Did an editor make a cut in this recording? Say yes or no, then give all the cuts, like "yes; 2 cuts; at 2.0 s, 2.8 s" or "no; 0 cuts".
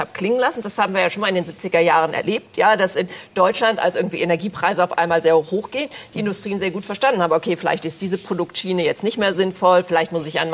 yes; 1 cut; at 9.3 s